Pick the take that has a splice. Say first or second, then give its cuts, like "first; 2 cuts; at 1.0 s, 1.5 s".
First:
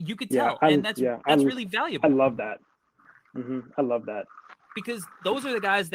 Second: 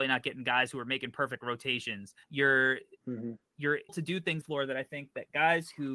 second; 3 cuts; at 2.2 s, 3.9 s, 4.4 s